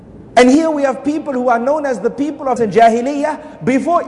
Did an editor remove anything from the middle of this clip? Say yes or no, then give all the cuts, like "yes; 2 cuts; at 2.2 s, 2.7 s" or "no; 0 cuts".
yes; 1 cut; at 2.6 s